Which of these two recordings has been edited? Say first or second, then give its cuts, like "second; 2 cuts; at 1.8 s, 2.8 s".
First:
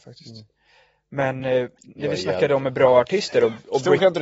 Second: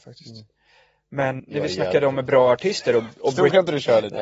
second; 1 cut; at 1.4 s